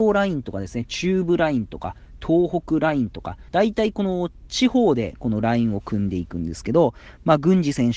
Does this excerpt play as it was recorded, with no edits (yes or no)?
no